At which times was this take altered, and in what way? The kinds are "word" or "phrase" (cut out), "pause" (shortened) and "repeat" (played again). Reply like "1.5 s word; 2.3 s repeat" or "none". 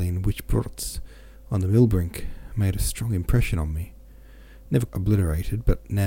4.9 s word